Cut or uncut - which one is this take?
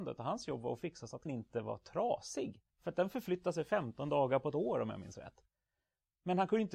cut